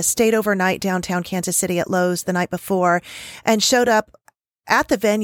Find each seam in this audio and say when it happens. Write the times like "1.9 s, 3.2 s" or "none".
none